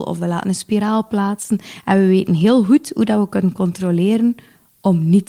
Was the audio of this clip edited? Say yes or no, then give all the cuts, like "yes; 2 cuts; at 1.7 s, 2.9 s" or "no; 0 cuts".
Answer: no; 0 cuts